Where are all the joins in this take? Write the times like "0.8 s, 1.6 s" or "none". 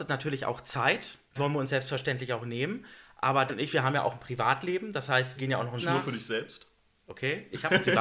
1.4 s, 3.5 s, 5.4 s, 5.8 s

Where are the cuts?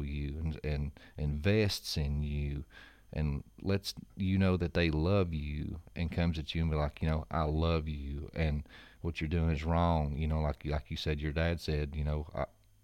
none

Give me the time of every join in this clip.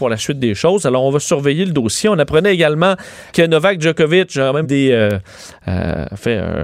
3.3 s, 4.6 s

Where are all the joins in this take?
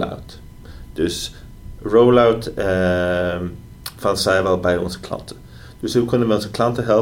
none

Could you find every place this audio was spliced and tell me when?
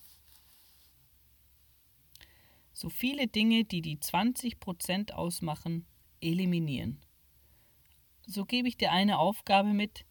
none

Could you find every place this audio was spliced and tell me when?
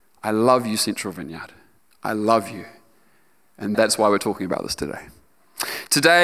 3.7 s

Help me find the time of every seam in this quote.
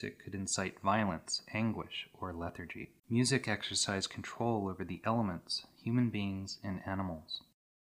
3.0 s

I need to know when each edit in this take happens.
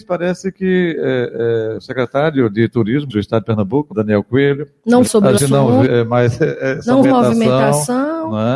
1.8 s, 3.1 s, 3.9 s, 5.1 s, 5.4 s, 5.9 s, 7.0 s

